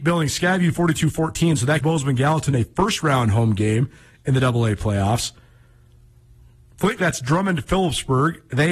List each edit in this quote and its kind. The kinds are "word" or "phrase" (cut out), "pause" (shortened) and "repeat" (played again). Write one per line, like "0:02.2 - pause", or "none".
0:01.8 - word
0:07.0 - word